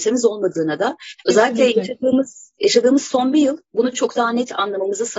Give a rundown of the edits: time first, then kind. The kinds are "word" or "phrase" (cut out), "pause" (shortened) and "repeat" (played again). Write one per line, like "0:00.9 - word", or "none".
none